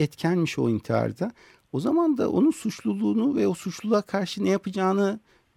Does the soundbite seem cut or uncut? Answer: uncut